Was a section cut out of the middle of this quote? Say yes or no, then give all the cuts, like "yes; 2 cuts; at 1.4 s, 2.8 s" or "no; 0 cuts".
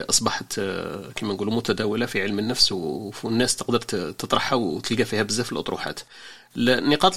no; 0 cuts